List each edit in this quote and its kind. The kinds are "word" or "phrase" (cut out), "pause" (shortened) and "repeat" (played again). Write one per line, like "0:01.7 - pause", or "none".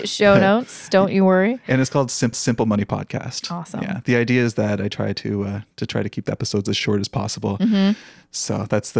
0:02.3 - repeat